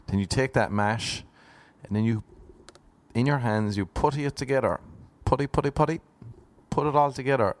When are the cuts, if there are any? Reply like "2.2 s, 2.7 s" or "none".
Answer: none